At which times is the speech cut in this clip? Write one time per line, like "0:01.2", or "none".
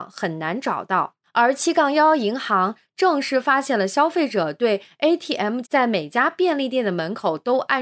0:05.6